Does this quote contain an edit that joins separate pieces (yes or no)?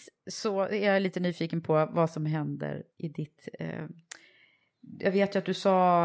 yes